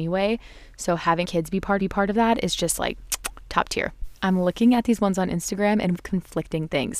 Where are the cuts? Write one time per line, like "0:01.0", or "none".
0:01.2
0:01.8
0:05.9